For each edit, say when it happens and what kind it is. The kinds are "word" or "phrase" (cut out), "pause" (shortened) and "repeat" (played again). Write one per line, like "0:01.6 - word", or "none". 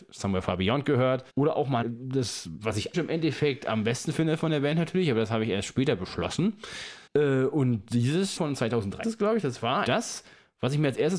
0:01.3 - pause
0:01.8 - word
0:02.9 - word
0:07.1 - pause
0:08.4 - word
0:09.0 - word
0:09.8 - word